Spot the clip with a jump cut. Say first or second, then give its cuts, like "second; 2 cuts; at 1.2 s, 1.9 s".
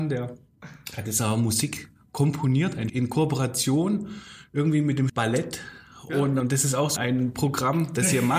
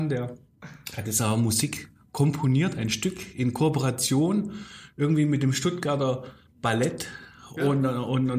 first; 4 cuts; at 2.9 s, 5.1 s, 6.4 s, 7.0 s